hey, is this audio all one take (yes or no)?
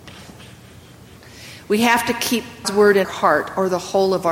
no